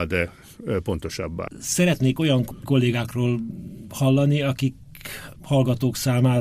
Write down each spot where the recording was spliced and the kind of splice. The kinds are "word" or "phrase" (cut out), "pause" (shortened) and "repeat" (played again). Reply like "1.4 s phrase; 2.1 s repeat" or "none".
2.6 s word; 5.4 s word